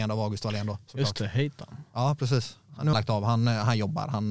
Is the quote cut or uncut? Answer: cut